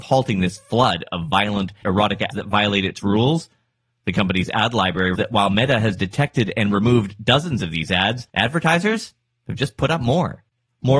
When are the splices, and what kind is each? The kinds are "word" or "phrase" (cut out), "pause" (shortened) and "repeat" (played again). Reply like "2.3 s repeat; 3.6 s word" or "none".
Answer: 1.8 s word; 2.3 s word; 5.2 s word; 8.3 s pause